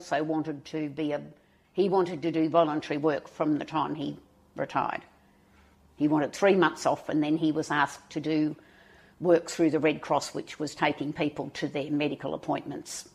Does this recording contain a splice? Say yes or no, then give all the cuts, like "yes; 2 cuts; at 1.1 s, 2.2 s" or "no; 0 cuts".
no; 0 cuts